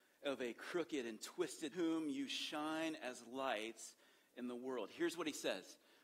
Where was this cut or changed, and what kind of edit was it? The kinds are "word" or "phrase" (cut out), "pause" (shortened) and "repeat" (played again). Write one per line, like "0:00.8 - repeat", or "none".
0:01.7 - phrase